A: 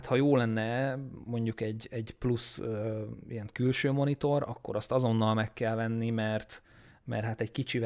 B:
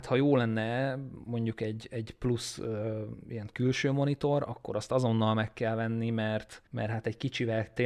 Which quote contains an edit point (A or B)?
B